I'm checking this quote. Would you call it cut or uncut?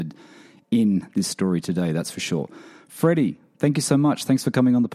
uncut